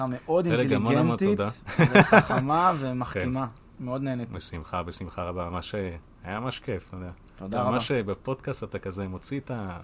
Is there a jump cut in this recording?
no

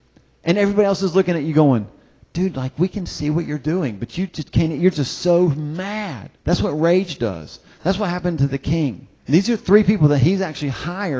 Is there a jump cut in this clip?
yes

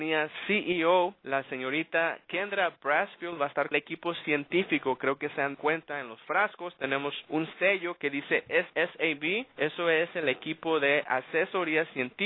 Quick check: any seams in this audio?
yes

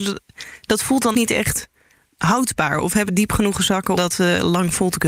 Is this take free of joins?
no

